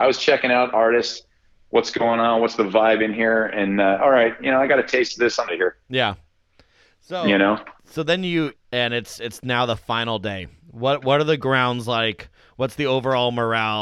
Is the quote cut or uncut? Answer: cut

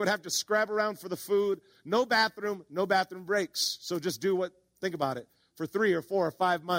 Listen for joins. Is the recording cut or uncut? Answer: uncut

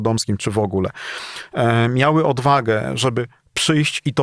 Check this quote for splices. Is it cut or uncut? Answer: uncut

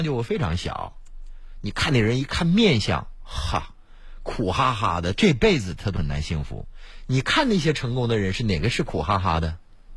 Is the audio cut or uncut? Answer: uncut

